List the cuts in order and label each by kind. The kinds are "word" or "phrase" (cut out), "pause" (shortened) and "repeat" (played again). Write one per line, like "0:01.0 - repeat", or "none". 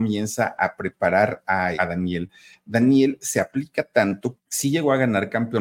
0:01.8 - word
0:04.4 - word